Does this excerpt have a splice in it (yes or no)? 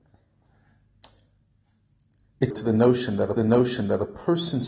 yes